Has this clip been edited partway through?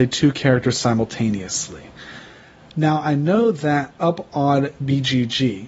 no; 0 cuts

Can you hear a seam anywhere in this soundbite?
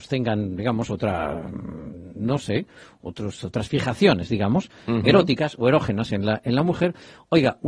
no; 0 cuts

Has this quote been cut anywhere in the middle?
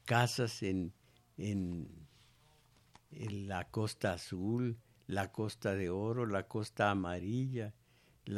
no; 0 cuts

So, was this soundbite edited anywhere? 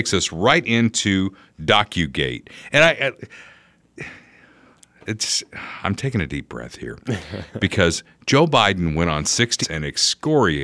yes; 1 cut; at 9.6 s

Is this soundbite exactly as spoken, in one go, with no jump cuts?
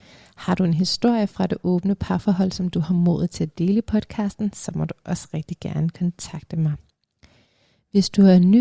yes; 0 cuts

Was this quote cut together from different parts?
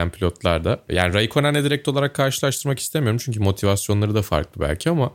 no; 0 cuts

